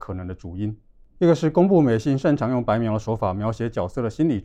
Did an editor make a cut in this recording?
no; 0 cuts

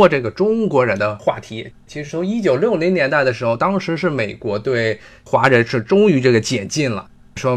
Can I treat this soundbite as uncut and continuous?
yes; 0 cuts

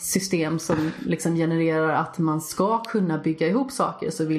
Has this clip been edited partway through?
no; 0 cuts

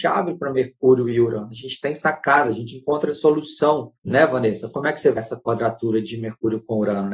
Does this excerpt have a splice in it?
yes; 2 cuts; at 4.0 s, 5.2 s

